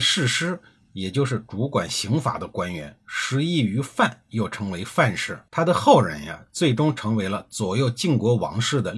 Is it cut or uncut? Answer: cut